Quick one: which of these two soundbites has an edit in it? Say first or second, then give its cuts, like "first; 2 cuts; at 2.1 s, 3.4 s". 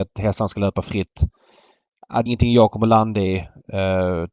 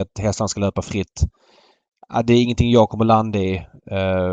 first; 1 cut; at 2.3 s